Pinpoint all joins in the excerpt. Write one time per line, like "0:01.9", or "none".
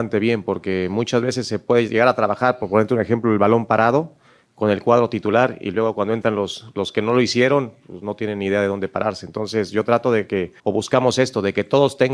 0:10.6